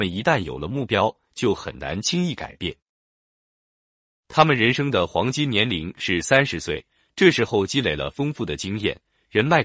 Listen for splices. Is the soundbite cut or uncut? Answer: uncut